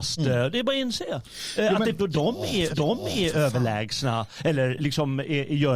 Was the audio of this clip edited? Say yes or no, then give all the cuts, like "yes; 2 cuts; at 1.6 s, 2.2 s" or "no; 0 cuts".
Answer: yes; 2 cuts; at 2.0 s, 2.7 s